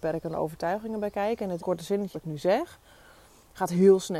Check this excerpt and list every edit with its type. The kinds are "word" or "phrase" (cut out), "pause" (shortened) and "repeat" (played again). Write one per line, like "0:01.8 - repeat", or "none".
0:01.6 - word
0:02.1 - word